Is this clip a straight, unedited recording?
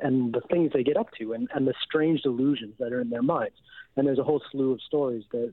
yes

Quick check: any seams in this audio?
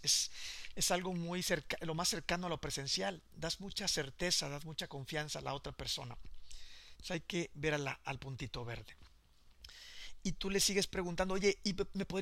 no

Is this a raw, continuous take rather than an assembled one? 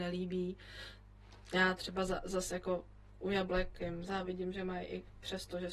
yes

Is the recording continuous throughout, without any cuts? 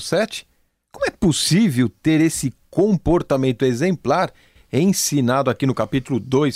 yes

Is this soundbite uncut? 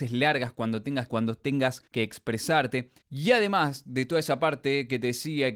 no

